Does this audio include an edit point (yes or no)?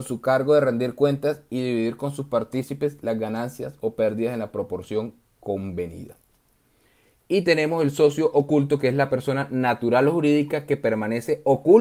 no